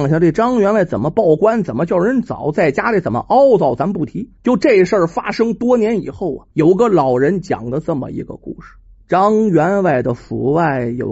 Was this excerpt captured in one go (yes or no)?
no